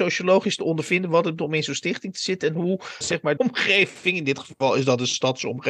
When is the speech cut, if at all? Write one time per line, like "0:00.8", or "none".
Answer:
0:01.4
0:03.0
0:03.4